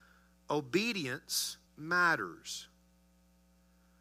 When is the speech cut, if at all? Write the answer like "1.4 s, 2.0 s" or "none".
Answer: 1.7 s